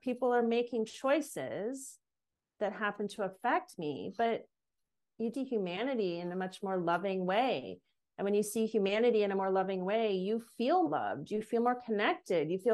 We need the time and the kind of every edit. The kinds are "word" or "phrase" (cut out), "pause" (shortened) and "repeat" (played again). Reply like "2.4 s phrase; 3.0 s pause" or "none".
5.3 s word; 10.9 s word